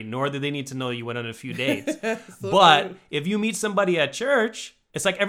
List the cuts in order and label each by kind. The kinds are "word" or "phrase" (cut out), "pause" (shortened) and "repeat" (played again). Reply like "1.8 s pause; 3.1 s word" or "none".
none

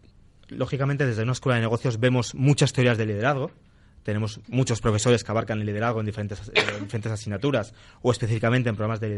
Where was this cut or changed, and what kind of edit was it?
4.4 s pause

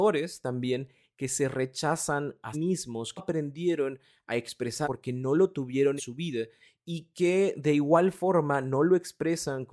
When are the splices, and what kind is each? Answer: 2.5 s word; 3.2 s word; 4.8 s word; 6.0 s word

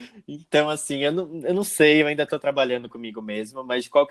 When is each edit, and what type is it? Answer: none

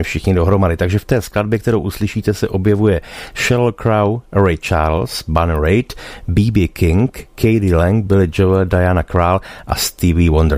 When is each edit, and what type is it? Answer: none

